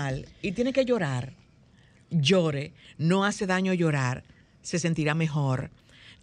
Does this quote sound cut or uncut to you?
uncut